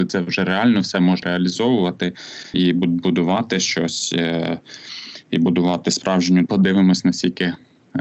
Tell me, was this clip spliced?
yes; 3 cuts; at 1.2 s, 2.5 s, 6.5 s

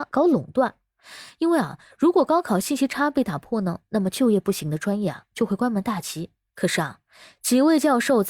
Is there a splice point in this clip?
no; 0 cuts

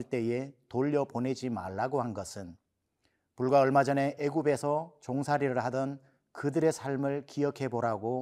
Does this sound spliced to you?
no; 0 cuts

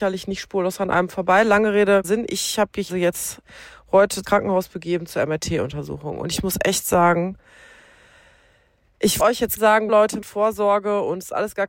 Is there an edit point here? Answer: yes; 7 cuts; at 2.0 s, 2.9 s, 4.2 s, 9.2 s, 9.6 s, 9.9 s, 10.2 s

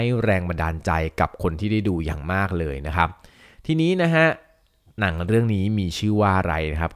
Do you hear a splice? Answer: no; 0 cuts

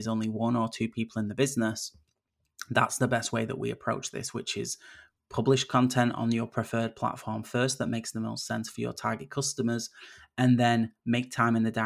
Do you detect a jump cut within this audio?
no; 0 cuts

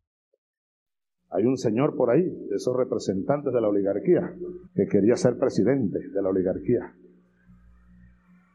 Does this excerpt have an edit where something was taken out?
yes; 1 cut; at 4.7 s

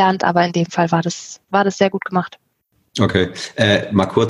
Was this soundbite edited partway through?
yes; 1 cut; at 1.4 s

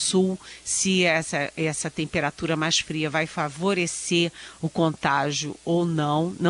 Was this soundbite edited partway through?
no; 0 cuts

